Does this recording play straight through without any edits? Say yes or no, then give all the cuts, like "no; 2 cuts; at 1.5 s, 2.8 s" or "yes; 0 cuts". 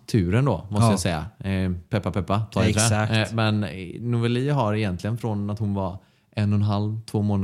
yes; 0 cuts